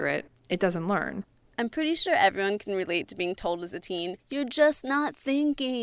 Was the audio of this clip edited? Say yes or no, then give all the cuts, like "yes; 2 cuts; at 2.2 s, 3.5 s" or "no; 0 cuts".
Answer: no; 0 cuts